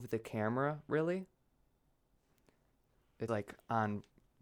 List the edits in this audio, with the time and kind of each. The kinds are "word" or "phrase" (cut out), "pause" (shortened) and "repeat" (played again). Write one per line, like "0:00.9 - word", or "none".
0:03.3 - word